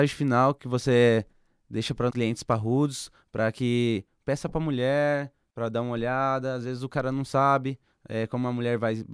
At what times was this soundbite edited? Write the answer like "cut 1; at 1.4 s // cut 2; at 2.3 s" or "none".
cut 1; at 2.1 s